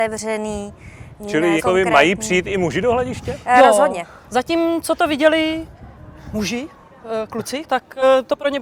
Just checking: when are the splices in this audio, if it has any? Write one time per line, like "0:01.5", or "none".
0:01.6
0:07.6